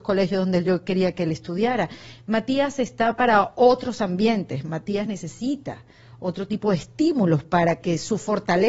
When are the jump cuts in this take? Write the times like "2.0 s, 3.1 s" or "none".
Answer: none